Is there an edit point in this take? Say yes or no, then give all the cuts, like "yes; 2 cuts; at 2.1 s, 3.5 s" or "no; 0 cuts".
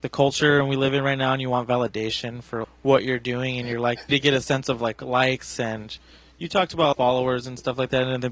yes; 3 cuts; at 2.6 s, 4.1 s, 6.9 s